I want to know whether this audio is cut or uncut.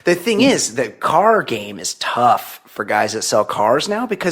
uncut